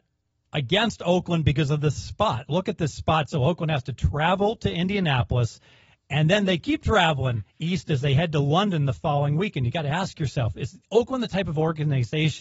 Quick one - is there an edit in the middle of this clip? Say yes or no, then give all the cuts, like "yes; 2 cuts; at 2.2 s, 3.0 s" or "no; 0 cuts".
no; 0 cuts